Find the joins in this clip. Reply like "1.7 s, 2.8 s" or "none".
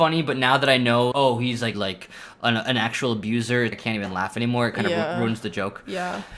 1.1 s, 1.7 s, 3.7 s

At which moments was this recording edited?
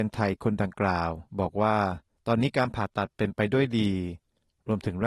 1.3 s, 2.2 s

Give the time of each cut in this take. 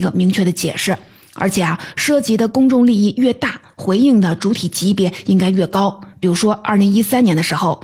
none

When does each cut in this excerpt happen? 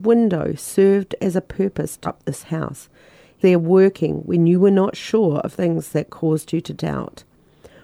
2.0 s, 3.4 s, 5.5 s

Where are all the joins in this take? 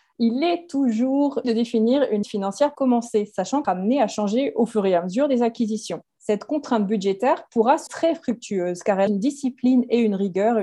1.4 s, 2.2 s, 2.7 s, 3.6 s, 6.1 s, 7.9 s, 9.1 s

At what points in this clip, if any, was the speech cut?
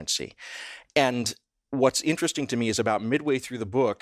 none

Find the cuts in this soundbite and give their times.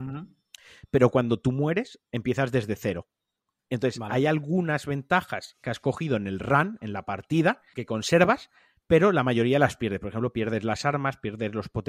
7.7 s

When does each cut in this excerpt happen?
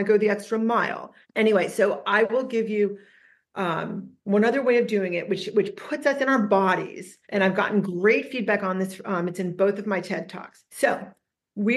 1.2 s, 4.2 s, 7.2 s, 10.7 s

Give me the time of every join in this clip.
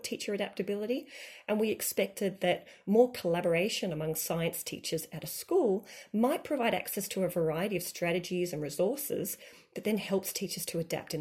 none

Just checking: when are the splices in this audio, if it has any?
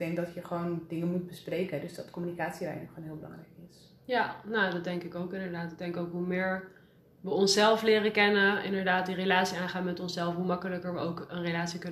none

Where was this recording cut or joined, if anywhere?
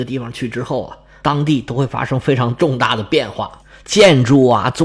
none

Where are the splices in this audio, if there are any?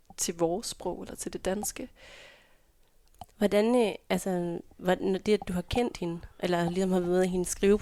3.3 s, 6.3 s

